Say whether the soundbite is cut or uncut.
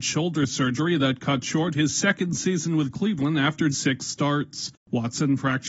cut